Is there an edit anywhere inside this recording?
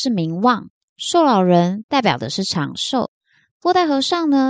no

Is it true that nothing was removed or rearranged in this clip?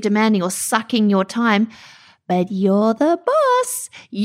yes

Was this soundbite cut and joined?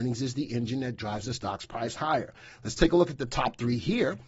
no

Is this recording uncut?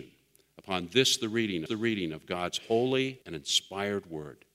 no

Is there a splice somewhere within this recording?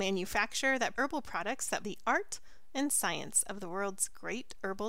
yes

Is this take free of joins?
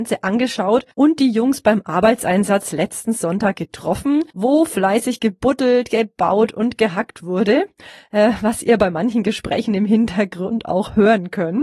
no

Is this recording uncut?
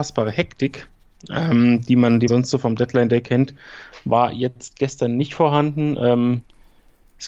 no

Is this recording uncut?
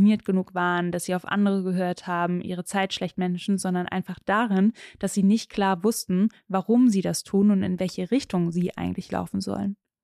yes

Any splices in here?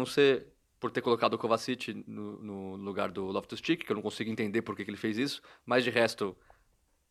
no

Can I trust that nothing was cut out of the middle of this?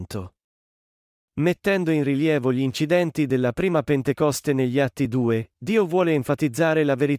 yes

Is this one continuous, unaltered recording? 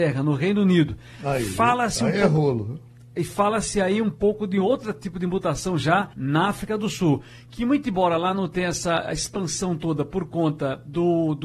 no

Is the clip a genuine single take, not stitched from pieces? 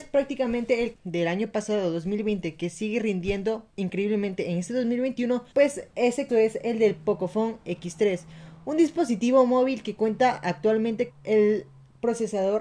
no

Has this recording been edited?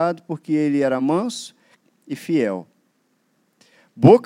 no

